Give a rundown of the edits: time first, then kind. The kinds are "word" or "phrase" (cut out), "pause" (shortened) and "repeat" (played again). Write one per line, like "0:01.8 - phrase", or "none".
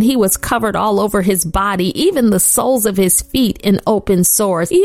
none